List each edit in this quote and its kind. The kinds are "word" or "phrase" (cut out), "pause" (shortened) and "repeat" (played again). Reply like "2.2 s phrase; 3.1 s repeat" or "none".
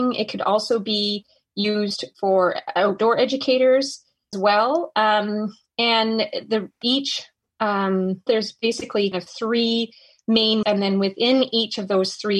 4.3 s word; 8.3 s word; 9.1 s word; 10.6 s word